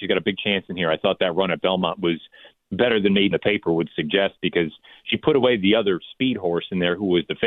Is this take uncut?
no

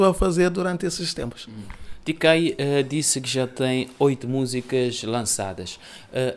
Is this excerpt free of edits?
yes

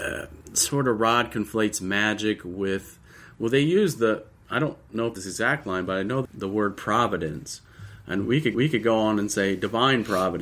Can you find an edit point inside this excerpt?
yes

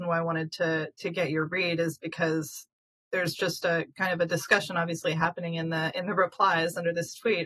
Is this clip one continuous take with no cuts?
yes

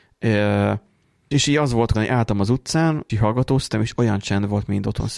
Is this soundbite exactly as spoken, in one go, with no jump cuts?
no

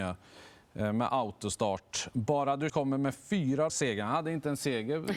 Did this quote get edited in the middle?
yes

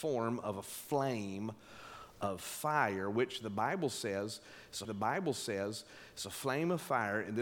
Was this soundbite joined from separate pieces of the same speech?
yes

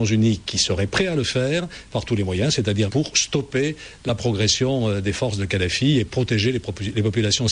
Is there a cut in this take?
yes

